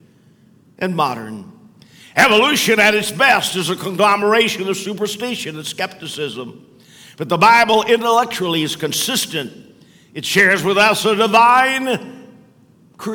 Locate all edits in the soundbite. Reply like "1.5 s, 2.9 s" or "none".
none